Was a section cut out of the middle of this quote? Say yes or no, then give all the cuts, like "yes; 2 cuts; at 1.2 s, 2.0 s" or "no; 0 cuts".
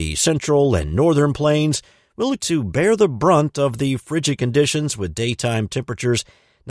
yes; 1 cut; at 2.4 s